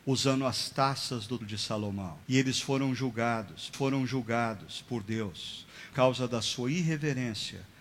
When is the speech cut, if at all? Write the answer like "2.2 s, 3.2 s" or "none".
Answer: 1.4 s, 2.2 s, 3.7 s, 5.9 s